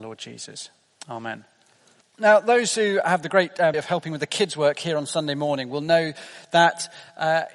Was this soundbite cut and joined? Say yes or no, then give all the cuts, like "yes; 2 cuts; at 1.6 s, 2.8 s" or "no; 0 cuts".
yes; 2 cuts; at 2.0 s, 3.7 s